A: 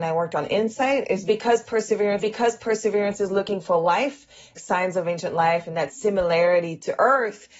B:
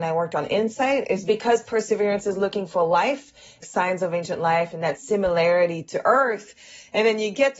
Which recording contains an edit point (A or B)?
A